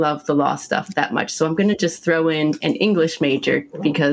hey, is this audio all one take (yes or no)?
yes